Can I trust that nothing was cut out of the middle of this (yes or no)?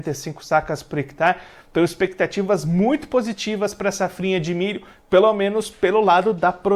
yes